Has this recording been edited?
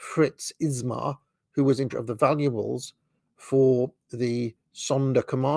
yes; 1 cut; at 1.9 s

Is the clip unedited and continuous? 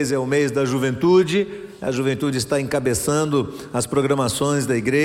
yes; 0 cuts

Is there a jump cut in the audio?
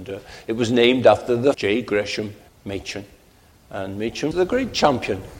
yes; 3 cuts; at 1.5 s, 2.5 s, 4.3 s

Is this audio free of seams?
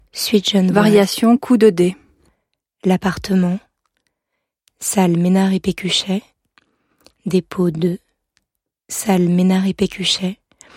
yes; 0 cuts

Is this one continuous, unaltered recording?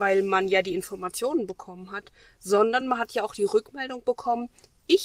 yes; 0 cuts

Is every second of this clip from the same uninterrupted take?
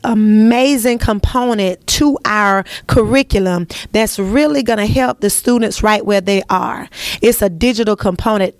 yes; 0 cuts

